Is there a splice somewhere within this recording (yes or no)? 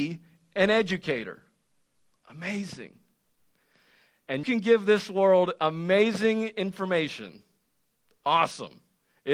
yes